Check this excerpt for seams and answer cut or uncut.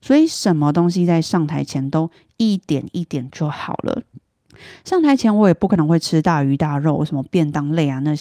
uncut